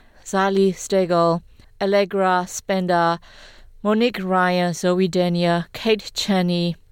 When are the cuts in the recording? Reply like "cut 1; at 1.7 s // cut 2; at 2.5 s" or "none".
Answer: none